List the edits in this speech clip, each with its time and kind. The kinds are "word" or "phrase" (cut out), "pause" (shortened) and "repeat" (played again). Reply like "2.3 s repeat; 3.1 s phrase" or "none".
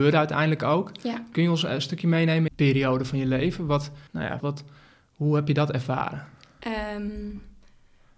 2.5 s phrase; 4.1 s pause; 4.4 s word